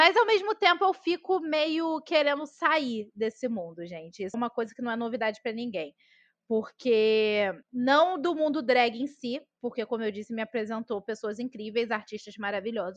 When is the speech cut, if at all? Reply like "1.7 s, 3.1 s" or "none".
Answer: 4.3 s, 7.6 s

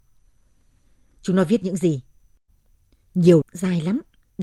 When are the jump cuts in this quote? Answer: 3.4 s

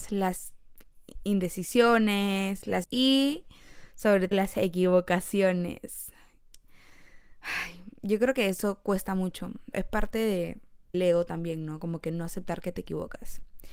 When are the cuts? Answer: 2.8 s, 4.3 s, 9.7 s, 10.9 s

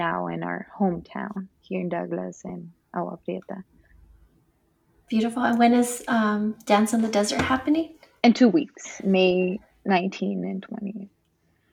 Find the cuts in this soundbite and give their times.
none

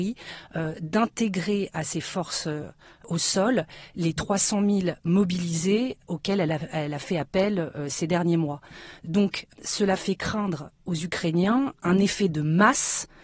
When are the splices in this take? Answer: none

